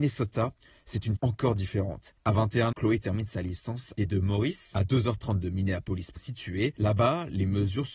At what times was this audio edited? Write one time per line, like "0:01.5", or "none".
0:01.2
0:02.7
0:04.0
0:05.4
0:06.2